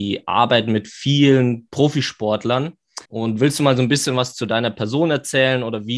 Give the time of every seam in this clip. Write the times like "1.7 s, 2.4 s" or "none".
3.0 s